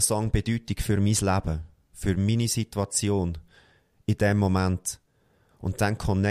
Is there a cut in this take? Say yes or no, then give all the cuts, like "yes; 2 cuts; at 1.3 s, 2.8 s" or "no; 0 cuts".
no; 0 cuts